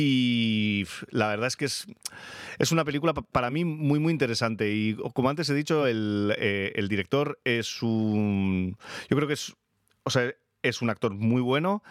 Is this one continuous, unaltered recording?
yes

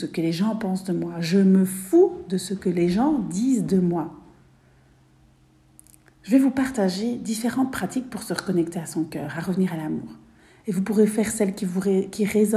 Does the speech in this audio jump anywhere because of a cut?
no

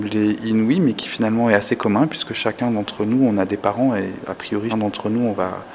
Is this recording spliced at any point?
yes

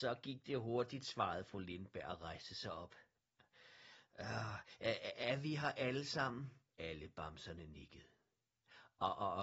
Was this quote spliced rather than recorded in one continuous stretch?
yes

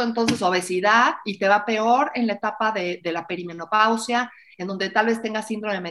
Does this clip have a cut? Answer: no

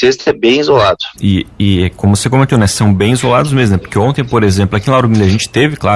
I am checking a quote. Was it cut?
yes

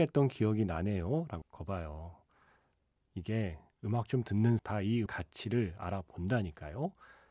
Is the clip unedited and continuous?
no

